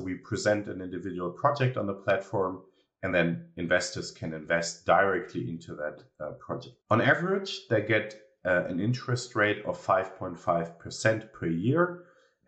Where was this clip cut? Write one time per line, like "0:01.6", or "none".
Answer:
none